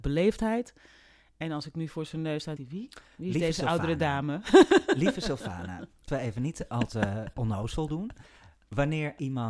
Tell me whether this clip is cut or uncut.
cut